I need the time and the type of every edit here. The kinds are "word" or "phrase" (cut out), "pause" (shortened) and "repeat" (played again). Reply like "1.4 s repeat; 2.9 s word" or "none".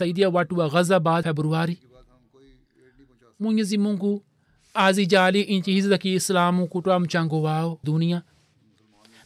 1.2 s word; 7.8 s word